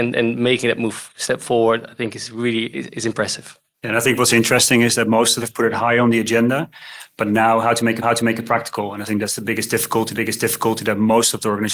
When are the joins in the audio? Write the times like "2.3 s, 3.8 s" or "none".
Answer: 2.7 s, 3.7 s, 5.4 s, 8.0 s, 10.1 s